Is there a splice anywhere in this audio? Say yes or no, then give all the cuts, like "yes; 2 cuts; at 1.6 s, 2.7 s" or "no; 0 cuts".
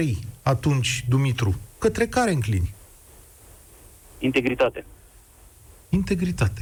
no; 0 cuts